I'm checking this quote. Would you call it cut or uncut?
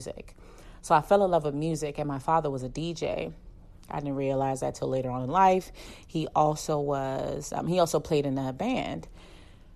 uncut